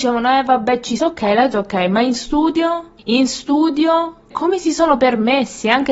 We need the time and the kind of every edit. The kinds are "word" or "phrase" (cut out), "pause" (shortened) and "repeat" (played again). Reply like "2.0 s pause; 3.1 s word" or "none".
1.0 s phrase; 1.5 s word; 3.0 s pause; 4.3 s word